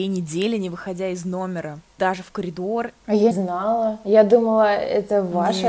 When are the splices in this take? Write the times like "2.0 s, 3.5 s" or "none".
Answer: 3.3 s